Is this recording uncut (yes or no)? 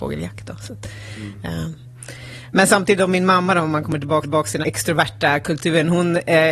no